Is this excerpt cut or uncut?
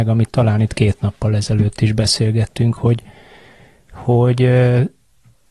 uncut